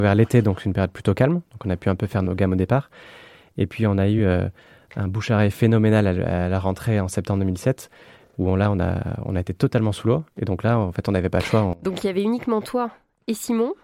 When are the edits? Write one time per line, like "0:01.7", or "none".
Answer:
none